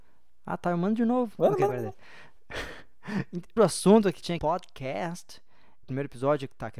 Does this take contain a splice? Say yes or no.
yes